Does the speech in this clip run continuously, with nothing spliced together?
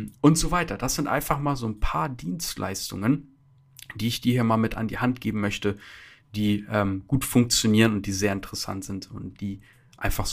yes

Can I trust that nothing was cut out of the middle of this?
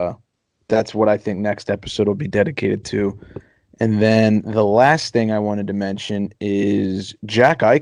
yes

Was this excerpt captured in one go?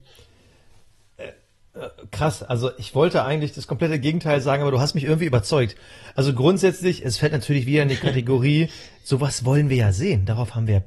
yes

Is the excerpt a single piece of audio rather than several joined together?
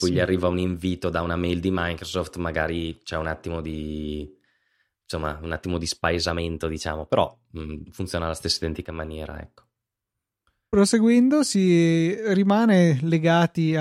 yes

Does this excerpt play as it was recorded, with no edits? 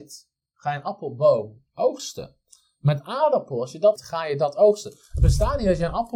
no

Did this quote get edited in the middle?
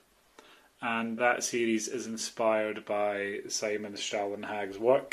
yes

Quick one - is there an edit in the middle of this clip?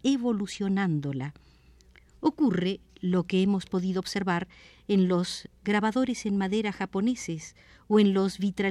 no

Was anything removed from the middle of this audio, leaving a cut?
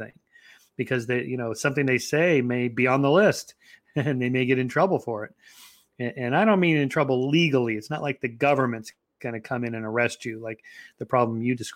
no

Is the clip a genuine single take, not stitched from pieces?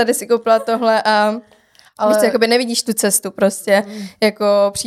yes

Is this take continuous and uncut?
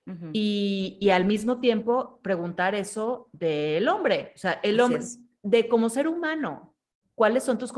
yes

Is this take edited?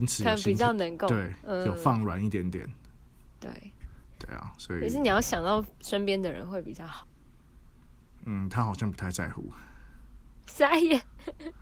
no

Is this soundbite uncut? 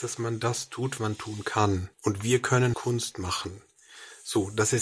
no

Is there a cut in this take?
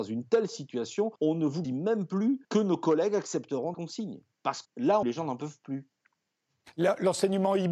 yes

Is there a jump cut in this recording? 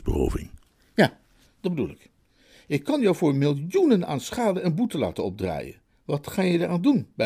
no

